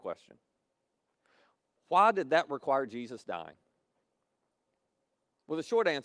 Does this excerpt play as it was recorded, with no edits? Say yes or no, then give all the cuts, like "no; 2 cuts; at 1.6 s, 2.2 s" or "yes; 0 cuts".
yes; 0 cuts